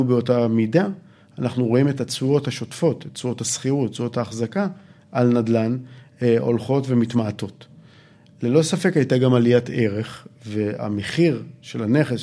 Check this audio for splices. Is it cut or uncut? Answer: uncut